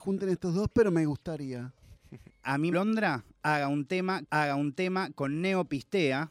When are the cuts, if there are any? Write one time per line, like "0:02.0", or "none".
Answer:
0:02.3
0:02.7
0:04.3